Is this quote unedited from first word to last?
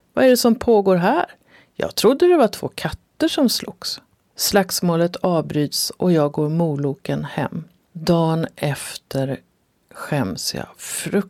yes; 0 cuts

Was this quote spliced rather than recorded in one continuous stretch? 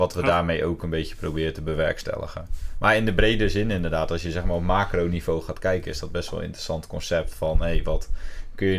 no; 0 cuts

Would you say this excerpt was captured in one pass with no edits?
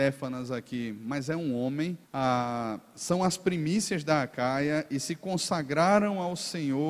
no; 1 cut; at 2.0 s

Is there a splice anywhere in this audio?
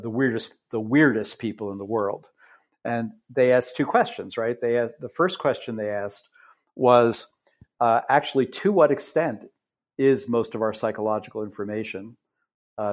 no; 0 cuts

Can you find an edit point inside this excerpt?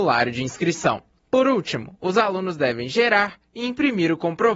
no; 0 cuts

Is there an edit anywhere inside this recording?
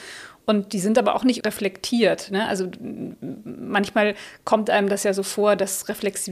yes; 1 cut; at 1.4 s

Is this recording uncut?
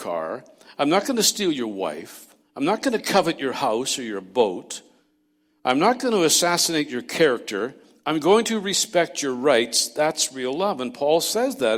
yes; 0 cuts

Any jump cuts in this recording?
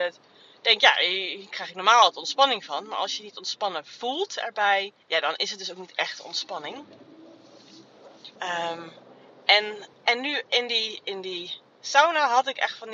yes; 3 cuts; at 5.0 s, 8.4 s, 9.9 s

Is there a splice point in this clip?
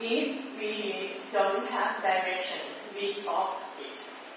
no; 0 cuts

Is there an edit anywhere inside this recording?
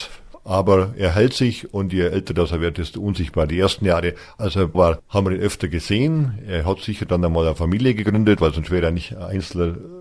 yes; 1 cut; at 4.7 s

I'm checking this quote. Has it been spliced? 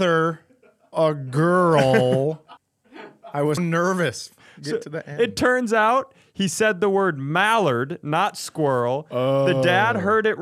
yes; 3 cuts; at 0.9 s, 2.6 s, 3.6 s

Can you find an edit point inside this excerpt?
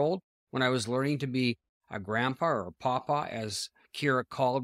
no; 0 cuts

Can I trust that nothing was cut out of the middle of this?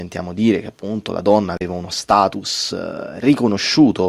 yes; 0 cuts

